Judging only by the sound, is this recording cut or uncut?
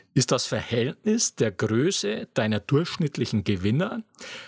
uncut